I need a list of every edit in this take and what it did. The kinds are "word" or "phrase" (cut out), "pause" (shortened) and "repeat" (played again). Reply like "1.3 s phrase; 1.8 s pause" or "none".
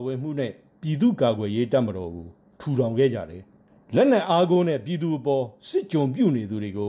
3.7 s pause